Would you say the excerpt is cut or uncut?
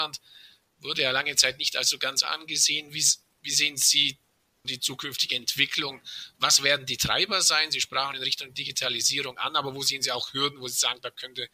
cut